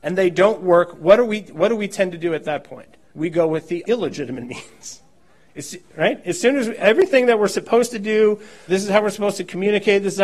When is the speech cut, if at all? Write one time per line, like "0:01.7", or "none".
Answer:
0:03.0
0:03.8
0:08.7